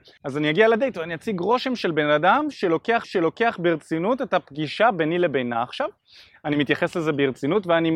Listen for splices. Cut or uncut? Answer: cut